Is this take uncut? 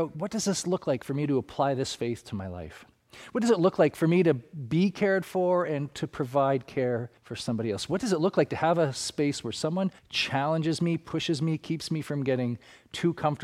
no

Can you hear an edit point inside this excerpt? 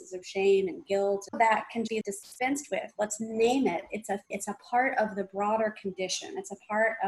yes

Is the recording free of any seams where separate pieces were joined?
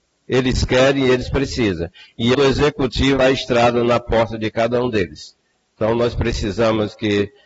no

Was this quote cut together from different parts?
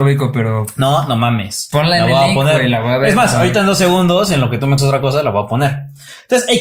yes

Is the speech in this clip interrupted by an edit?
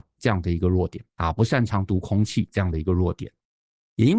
yes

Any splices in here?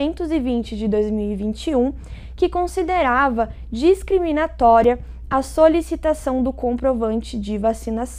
no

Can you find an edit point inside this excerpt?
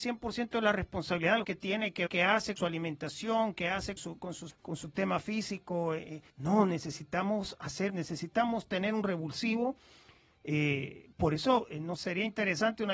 yes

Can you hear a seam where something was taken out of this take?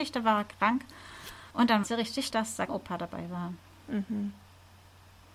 yes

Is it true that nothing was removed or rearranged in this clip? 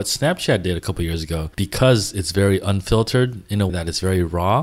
no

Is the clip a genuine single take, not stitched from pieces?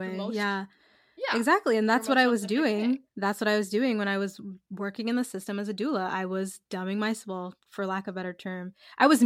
no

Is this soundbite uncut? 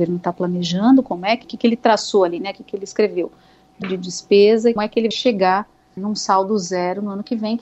no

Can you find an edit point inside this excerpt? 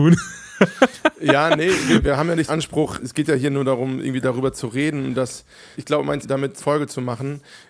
yes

